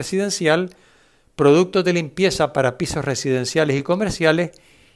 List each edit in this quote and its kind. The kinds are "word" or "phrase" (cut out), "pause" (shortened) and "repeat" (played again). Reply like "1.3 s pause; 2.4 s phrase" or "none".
none